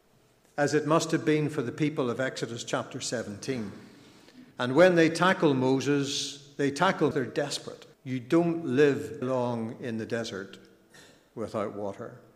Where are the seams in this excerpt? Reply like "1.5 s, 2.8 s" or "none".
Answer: 4.5 s, 7.1 s, 7.9 s, 9.2 s